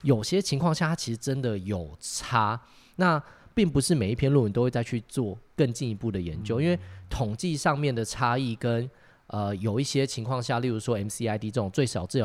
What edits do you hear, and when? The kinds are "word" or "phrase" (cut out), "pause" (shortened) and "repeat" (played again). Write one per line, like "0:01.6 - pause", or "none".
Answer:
none

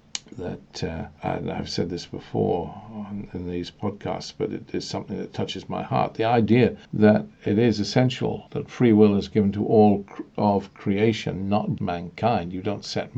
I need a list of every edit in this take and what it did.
0:06.8 - pause
0:08.5 - pause
0:11.8 - word

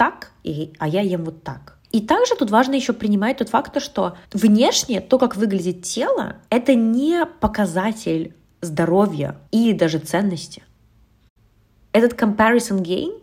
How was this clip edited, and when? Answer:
0:01.8 - pause
0:04.2 - pause
0:06.5 - pause
0:09.5 - pause

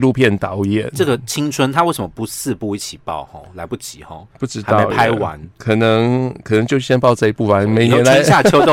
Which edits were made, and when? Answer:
0:04.3 - pause

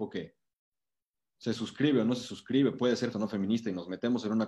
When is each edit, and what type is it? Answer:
0:03.1 - word

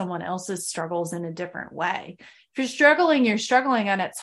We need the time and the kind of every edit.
none

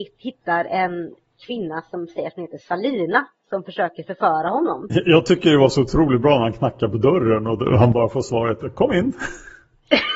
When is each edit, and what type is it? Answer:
none

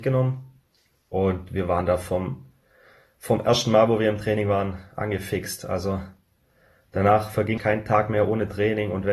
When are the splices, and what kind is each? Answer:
0:07.6 - word

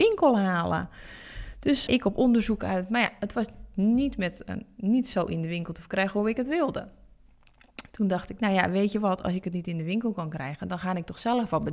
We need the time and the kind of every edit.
0:01.9 - word

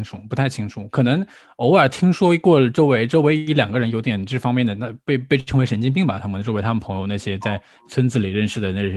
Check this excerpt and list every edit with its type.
none

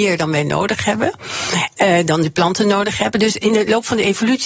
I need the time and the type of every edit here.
none

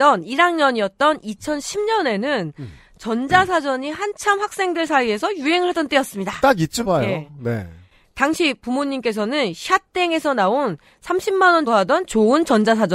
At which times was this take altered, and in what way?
0:06.8 - word
0:11.7 - word

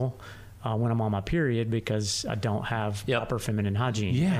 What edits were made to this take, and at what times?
none

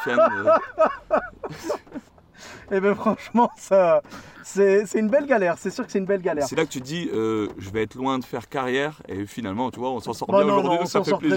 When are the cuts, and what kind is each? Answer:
0:02.1 - pause

